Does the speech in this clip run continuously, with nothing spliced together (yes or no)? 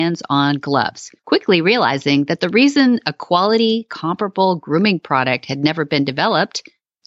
no